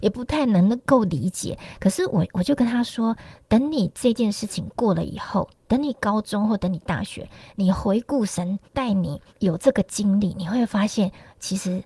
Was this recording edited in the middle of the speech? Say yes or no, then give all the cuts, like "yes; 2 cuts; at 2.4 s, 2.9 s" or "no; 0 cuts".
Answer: yes; 2 cuts; at 8.6 s, 9.3 s